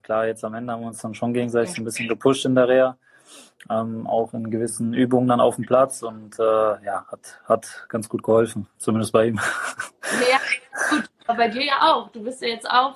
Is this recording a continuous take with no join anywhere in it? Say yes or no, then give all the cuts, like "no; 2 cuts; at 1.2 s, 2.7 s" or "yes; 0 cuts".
yes; 0 cuts